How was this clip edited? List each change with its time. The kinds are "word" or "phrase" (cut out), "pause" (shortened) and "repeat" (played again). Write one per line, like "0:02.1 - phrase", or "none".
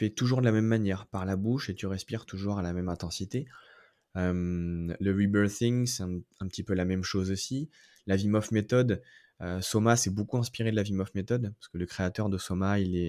none